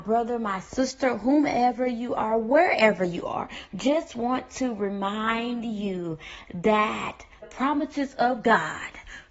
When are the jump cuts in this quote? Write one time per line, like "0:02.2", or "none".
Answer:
0:07.4